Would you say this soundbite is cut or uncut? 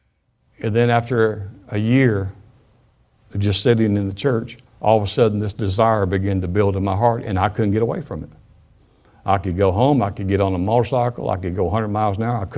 cut